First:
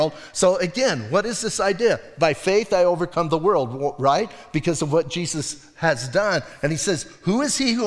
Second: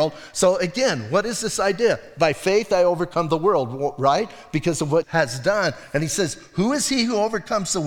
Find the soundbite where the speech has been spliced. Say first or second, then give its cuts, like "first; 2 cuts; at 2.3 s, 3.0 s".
second; 1 cut; at 5.0 s